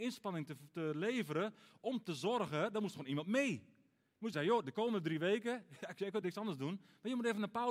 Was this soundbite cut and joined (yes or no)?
yes